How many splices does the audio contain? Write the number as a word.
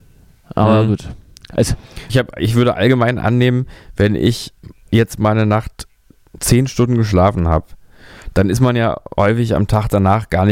one